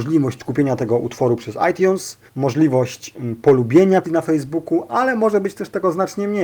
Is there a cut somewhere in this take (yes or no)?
yes